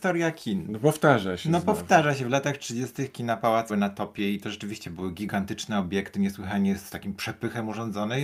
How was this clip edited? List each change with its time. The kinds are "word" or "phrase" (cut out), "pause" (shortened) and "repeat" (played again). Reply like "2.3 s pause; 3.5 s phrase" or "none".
3.7 s word